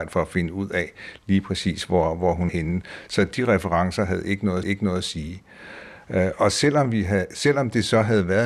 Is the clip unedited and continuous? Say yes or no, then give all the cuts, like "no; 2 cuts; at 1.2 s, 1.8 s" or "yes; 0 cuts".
no; 2 cuts; at 2.5 s, 4.6 s